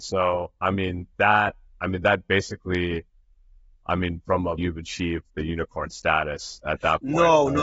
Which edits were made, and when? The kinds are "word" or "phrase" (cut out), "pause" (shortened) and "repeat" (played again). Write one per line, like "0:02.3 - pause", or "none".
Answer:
0:04.6 - phrase

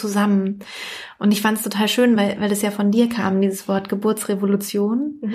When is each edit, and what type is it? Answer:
none

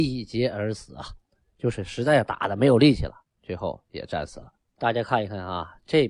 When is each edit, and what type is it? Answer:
0:03.3 - pause
0:04.6 - pause

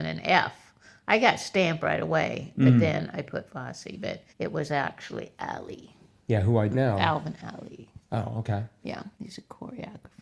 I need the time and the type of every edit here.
0:04.3 - pause
0:06.7 - word
0:09.1 - pause

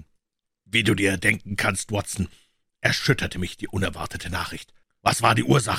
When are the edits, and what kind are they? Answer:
none

